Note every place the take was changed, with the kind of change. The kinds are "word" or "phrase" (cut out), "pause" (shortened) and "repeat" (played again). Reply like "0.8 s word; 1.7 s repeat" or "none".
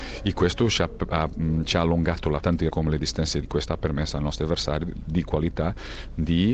2.4 s word; 2.7 s word; 3.4 s word